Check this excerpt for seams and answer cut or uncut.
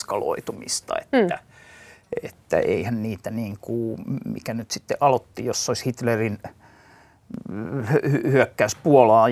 uncut